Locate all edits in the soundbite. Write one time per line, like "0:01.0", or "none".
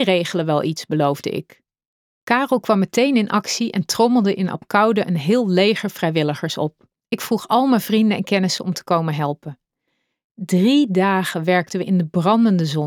none

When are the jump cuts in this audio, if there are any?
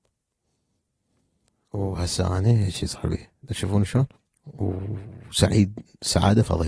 0:04.1

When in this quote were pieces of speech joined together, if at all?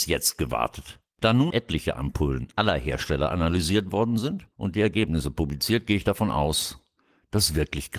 0:01.5
0:04.5

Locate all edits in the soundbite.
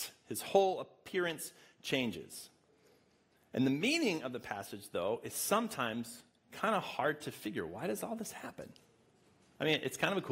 none

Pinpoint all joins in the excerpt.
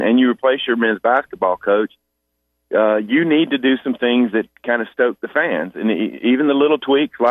none

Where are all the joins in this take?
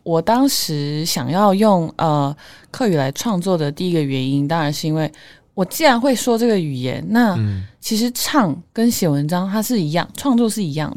none

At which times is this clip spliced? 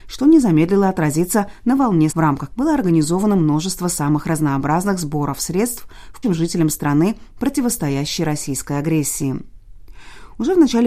0:02.1
0:02.5
0:06.2

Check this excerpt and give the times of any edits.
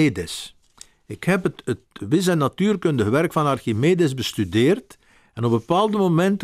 none

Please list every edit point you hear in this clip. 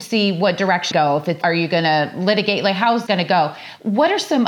0:00.9
0:01.4
0:03.1

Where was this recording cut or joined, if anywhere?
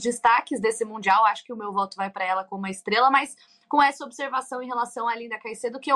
none

